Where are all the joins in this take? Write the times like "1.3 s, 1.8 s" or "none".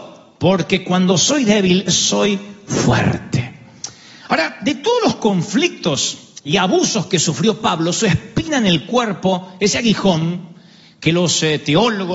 1.9 s, 6.4 s